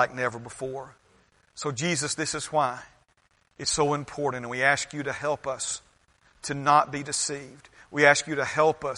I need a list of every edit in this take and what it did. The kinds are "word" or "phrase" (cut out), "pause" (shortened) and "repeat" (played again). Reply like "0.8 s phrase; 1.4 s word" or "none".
none

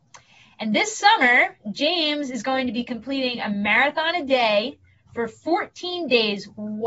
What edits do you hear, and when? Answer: none

